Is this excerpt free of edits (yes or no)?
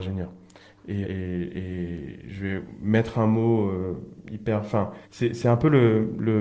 no